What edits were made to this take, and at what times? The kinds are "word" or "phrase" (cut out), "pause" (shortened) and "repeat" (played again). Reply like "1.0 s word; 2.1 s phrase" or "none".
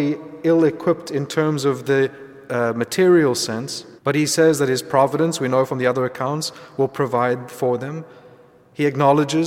4.0 s pause